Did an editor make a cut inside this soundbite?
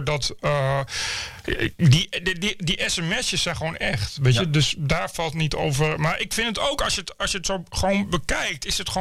no; 0 cuts

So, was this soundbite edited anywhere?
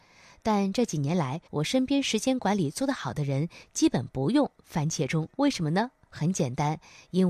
yes; 2 cuts; at 1.5 s, 5.3 s

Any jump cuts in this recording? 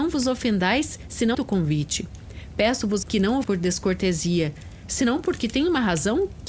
yes; 3 cuts; at 1.3 s, 3.0 s, 3.4 s

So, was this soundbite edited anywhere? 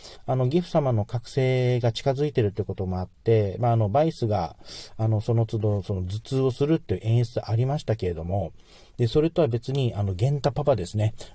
no; 0 cuts

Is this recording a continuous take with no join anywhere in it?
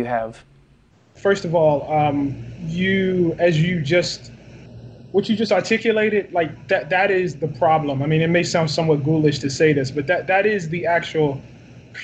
yes; 0 cuts

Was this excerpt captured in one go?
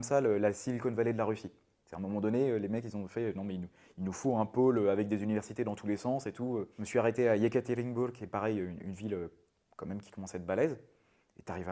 yes; 0 cuts

